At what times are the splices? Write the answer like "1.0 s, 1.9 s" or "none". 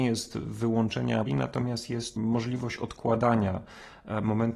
1.3 s, 2.2 s